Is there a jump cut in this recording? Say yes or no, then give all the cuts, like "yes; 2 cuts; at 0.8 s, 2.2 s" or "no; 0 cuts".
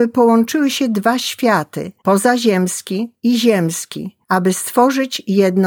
yes; 2 cuts; at 2.0 s, 4.2 s